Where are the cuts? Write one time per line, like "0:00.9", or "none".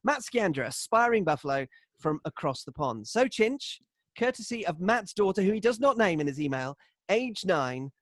none